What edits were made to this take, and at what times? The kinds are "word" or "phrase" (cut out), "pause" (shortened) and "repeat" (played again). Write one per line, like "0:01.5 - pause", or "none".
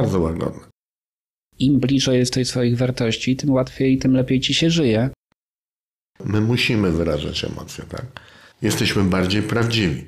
none